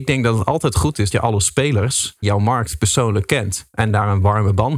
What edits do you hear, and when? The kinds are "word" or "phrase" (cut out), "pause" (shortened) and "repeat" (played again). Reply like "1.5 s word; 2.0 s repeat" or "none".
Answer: 1.1 s word; 2.2 s word